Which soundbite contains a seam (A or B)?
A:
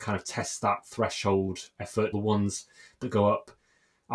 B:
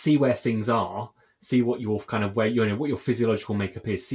A